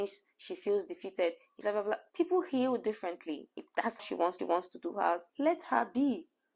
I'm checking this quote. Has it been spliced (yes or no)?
yes